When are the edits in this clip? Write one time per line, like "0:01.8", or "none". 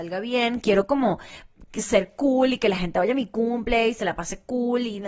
none